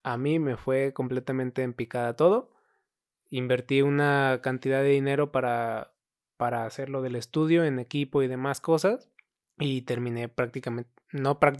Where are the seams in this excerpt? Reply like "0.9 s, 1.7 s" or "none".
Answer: 9.4 s